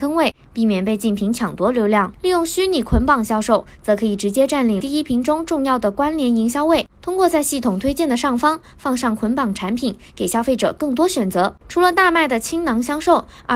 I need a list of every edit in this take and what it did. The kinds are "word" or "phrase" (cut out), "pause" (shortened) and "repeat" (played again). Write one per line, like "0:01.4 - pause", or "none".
0:04.8 - word
0:06.9 - pause